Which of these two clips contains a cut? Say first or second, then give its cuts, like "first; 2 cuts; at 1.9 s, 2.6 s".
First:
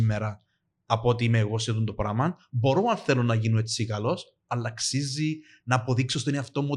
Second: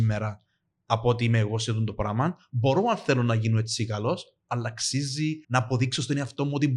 second; 1 cut; at 5.4 s